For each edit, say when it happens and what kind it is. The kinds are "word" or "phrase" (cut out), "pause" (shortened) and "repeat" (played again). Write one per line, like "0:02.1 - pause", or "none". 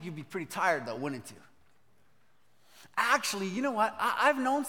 none

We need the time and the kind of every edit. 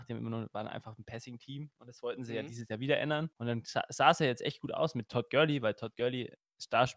0:03.3 - pause

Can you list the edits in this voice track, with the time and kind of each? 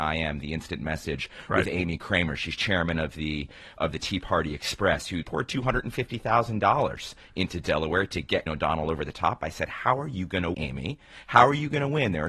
0:03.8 - word
0:05.2 - word
0:08.5 - word
0:10.5 - word

